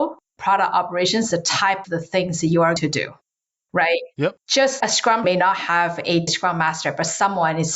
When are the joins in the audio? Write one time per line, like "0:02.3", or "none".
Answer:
0:01.3
0:01.8
0:02.8
0:04.8
0:05.2
0:06.3